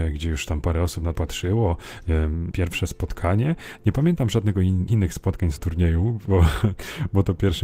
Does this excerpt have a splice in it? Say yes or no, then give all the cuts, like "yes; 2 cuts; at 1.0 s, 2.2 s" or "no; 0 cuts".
yes; 4 cuts; at 1.2 s, 2.5 s, 4.9 s, 5.6 s